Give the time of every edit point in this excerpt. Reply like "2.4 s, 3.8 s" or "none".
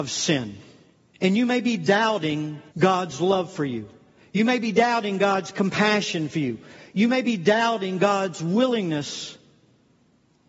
0.9 s, 2.7 s